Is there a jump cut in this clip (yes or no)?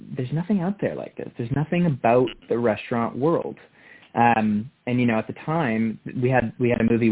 no